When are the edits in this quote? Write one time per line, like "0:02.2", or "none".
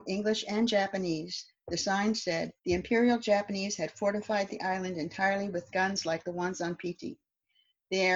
0:02.6